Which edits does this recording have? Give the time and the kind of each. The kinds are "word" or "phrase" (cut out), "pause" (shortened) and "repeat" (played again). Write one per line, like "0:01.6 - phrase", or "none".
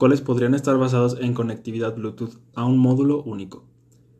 0:02.5 - word